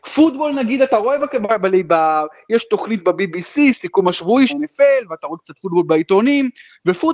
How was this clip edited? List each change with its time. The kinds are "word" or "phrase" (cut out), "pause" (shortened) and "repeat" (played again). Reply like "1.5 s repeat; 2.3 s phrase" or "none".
4.5 s word